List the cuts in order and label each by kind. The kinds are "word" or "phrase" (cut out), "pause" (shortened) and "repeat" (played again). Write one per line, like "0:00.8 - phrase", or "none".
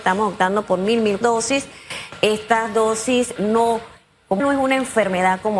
0:01.2 - word
0:03.4 - word
0:04.4 - word